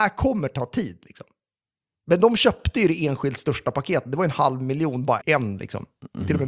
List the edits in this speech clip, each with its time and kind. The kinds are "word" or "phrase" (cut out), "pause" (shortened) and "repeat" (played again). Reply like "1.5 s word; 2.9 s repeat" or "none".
5.2 s word

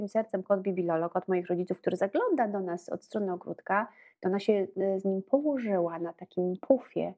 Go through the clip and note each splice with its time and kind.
none

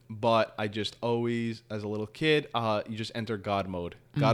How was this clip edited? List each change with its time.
none

